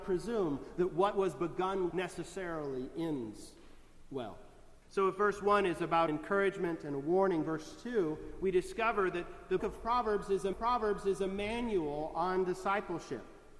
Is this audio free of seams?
no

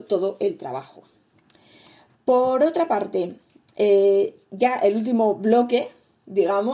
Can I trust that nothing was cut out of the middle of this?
yes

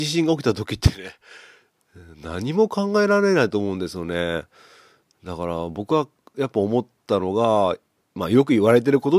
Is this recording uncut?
yes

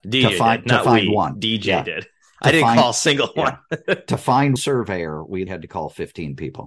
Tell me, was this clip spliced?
yes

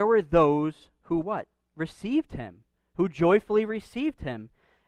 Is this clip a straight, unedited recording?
yes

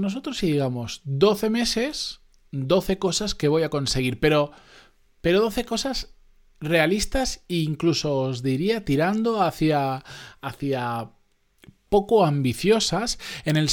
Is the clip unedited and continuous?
yes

